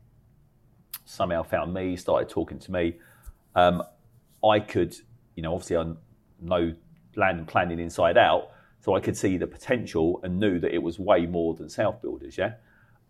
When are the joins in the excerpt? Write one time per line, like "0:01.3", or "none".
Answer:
none

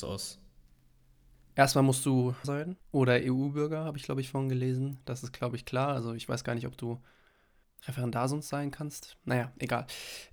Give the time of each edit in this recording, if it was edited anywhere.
0:02.4

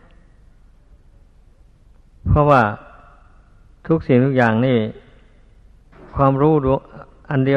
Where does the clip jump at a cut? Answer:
none

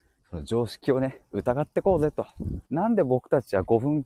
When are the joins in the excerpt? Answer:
0:02.7

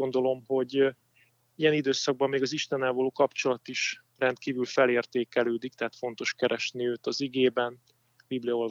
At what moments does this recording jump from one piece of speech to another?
none

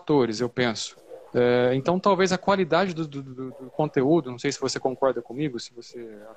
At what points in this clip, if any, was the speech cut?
0:01.3

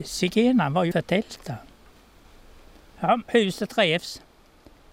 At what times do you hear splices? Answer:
0:00.9
0:03.3

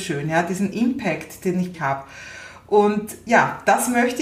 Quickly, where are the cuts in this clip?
0:01.7

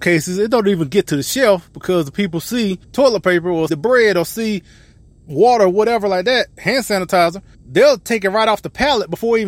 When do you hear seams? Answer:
0:02.8
0:03.7
0:07.5

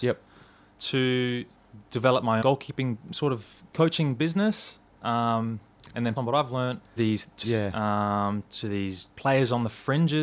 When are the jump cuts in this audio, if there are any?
0:02.4
0:03.7
0:06.2
0:07.0
0:07.4
0:09.1

